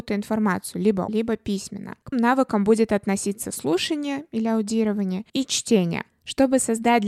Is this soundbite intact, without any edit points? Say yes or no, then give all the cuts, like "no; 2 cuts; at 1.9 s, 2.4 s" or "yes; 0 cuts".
no; 3 cuts; at 1.1 s, 2.1 s, 5.3 s